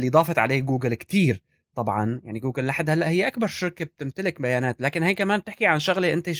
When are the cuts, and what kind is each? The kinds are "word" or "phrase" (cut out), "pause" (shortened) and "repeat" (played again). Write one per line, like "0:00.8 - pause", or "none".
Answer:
none